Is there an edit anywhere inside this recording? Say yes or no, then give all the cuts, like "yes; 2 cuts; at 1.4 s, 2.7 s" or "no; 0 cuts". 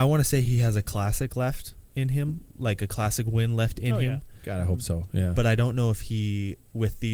yes; 1 cut; at 1.9 s